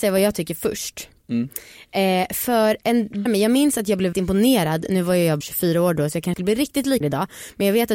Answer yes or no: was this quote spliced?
yes